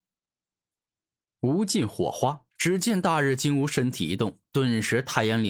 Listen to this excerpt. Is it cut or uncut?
cut